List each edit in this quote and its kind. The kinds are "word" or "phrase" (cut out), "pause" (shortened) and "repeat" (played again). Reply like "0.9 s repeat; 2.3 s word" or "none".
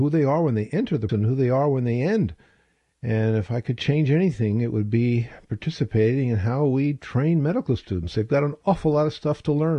1.1 s word